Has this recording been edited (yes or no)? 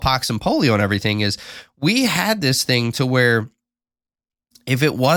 no